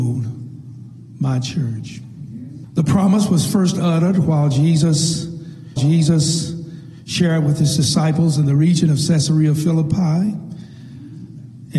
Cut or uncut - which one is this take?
cut